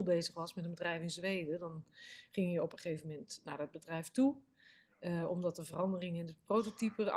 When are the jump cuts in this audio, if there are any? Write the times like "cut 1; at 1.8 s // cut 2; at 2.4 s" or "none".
none